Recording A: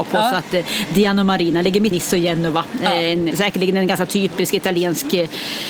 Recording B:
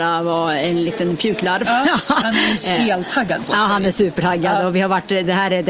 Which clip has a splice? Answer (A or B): A